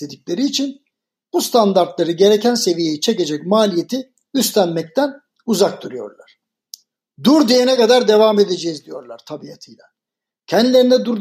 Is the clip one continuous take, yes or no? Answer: yes